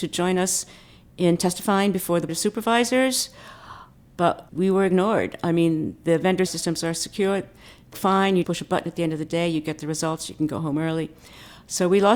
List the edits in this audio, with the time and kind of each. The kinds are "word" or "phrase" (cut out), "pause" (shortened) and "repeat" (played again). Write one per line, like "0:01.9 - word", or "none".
0:02.3 - word
0:03.9 - pause
0:06.5 - phrase
0:07.9 - word
0:08.4 - word